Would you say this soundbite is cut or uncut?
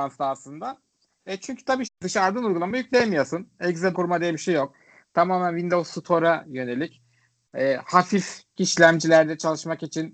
cut